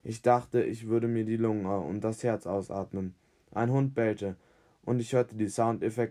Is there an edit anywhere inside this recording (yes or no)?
no